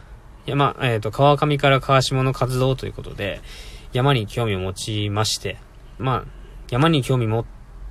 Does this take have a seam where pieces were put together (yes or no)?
yes